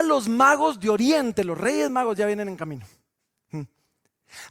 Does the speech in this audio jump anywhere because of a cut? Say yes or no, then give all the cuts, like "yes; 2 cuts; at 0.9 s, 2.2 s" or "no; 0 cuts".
no; 0 cuts